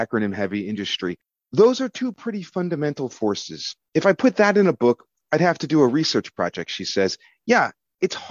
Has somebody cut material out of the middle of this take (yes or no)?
no